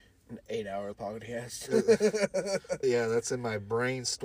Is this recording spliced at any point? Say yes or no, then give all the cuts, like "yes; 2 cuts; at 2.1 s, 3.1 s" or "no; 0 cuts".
yes; 2 cuts; at 0.9 s, 2.8 s